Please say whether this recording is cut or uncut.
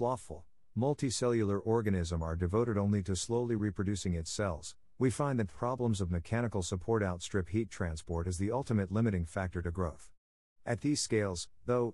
uncut